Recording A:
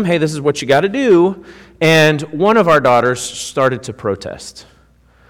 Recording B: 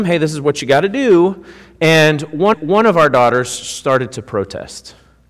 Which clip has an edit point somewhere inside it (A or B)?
B